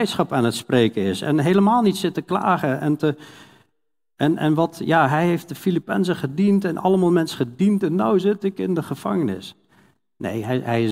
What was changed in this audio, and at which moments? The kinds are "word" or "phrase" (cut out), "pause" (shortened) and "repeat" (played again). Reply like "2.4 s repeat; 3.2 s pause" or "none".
none